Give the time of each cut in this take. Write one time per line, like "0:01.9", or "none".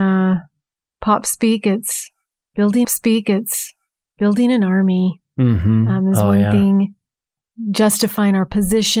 0:02.8